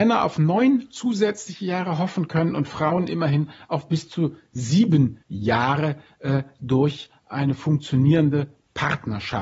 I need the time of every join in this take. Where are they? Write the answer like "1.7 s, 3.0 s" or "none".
5.2 s